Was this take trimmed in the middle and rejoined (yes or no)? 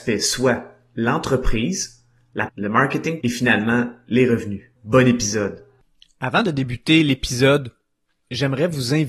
yes